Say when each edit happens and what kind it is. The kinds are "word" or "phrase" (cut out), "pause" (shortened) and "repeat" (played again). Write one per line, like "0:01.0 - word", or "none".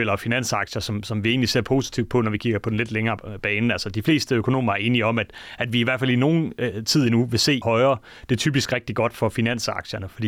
0:07.6 - phrase